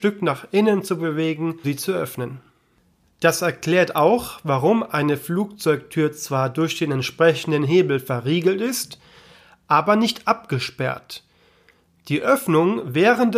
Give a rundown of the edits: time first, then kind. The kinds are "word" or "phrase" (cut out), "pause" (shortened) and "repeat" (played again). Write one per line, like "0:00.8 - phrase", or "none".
0:01.6 - word